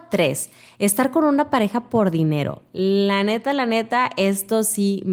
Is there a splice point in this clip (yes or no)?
no